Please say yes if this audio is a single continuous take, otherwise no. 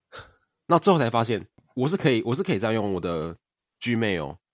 yes